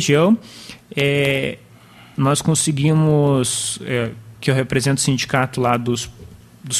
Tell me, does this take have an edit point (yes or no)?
no